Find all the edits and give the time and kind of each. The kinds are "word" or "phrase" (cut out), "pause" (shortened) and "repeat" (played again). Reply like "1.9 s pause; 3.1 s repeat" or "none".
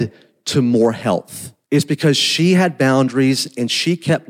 1.6 s pause